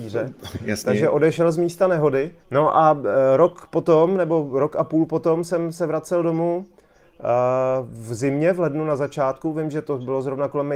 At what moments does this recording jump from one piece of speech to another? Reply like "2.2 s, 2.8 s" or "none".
2.4 s